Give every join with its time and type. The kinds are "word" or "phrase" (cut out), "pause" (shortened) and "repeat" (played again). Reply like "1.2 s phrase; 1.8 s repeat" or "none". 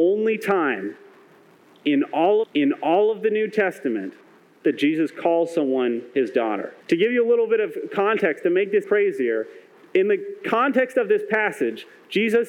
2.4 s repeat; 6.8 s pause; 8.8 s word